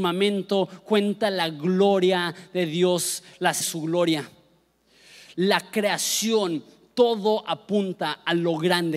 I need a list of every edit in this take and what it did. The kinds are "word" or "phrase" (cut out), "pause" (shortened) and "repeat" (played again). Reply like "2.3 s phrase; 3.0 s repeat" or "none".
3.6 s phrase